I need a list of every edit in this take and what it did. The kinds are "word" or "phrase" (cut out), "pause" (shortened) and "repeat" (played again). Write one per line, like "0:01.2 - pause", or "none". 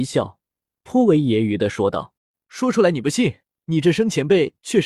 0:02.2 - pause
0:03.6 - pause